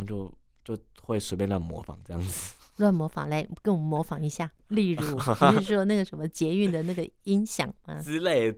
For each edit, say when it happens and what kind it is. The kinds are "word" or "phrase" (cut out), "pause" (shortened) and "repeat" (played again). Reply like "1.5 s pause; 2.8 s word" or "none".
4.6 s pause

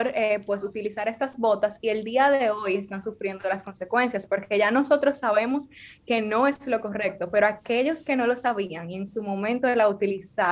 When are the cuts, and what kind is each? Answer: none

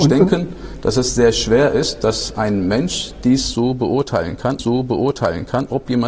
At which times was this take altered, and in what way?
4.6 s repeat

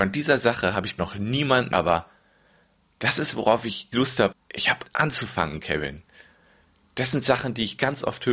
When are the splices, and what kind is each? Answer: 1.0 s word; 1.7 s word; 3.3 s word; 3.9 s word; 4.3 s word; 4.8 s word

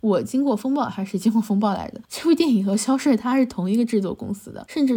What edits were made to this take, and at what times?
2.0 s pause

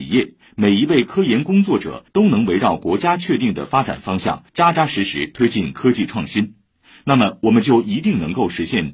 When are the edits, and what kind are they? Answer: 2.1 s pause; 4.5 s pause

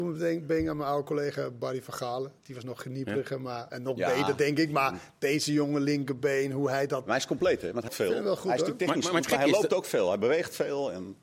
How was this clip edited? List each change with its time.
7.9 s word

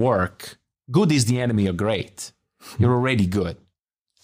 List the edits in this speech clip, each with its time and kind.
none

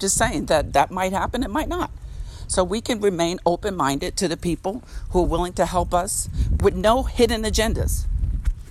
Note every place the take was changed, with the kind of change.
none

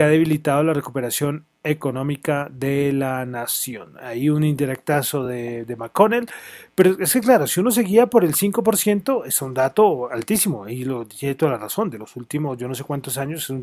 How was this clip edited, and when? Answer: none

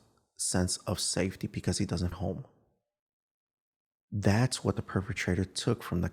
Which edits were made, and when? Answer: 2.1 s phrase

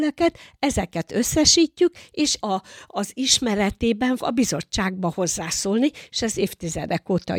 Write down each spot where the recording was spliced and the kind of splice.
2.4 s word; 4.2 s word

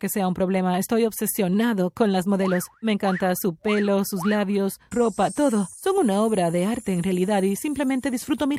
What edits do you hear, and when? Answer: 4.9 s phrase

